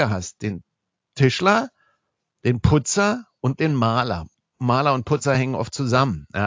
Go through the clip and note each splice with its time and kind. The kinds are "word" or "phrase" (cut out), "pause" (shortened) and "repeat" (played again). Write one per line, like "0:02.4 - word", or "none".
none